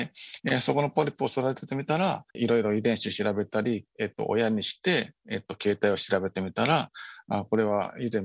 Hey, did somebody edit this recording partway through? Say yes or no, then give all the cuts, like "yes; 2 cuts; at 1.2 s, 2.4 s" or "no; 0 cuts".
yes; 1 cut; at 2.3 s